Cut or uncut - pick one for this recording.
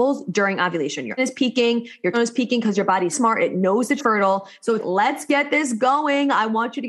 cut